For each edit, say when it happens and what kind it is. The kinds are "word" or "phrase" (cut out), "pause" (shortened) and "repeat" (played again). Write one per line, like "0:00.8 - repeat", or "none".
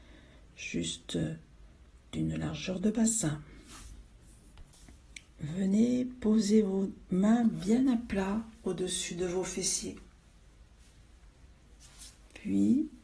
none